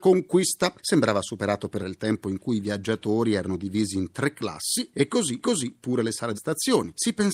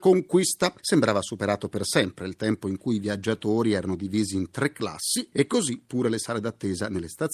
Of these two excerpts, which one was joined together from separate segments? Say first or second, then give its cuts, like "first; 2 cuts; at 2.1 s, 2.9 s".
first; 3 cuts; at 1.8 s, 5.4 s, 6.3 s